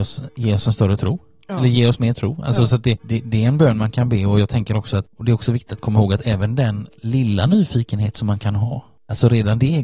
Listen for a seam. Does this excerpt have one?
no; 0 cuts

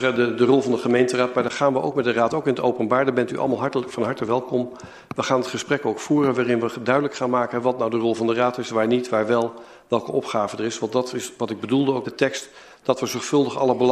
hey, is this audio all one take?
no; 1 cut; at 12.0 s

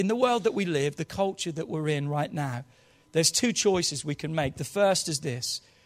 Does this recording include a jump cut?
no; 0 cuts

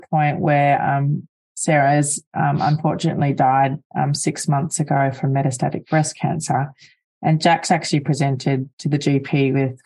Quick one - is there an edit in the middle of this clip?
no; 0 cuts

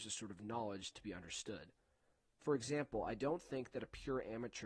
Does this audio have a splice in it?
no; 0 cuts

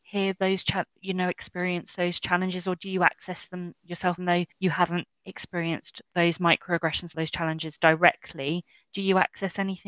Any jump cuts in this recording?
yes; 3 cuts; at 4.2 s, 4.5 s, 7.1 s

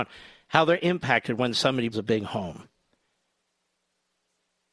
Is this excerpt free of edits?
no; 1 cut; at 1.9 s

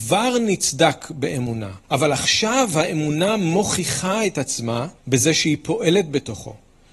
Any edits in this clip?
yes; 2 cuts; at 1.8 s, 5.0 s

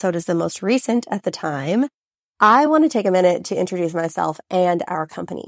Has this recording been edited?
no; 0 cuts

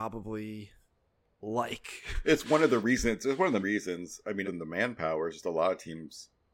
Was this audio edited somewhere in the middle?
yes; 2 cuts; at 3.6 s, 4.4 s

